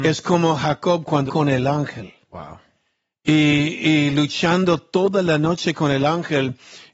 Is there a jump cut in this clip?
yes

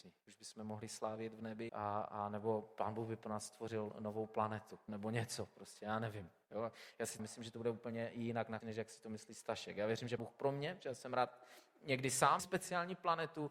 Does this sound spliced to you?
yes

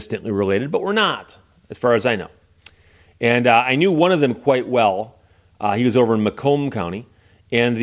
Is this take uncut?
yes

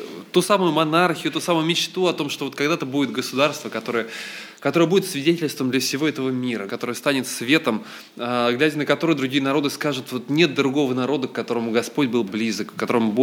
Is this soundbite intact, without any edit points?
no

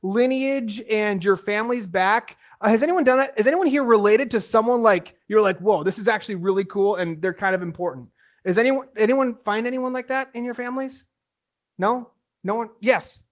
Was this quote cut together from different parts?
no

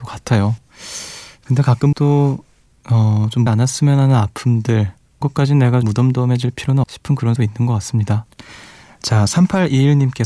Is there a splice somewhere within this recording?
yes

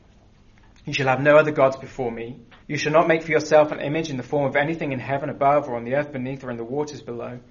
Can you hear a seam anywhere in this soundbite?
yes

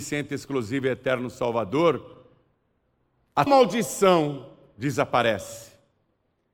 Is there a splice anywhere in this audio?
yes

